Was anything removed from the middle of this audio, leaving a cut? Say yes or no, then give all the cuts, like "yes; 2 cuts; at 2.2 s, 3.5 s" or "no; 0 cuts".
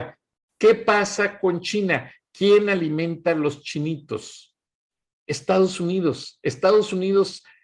no; 0 cuts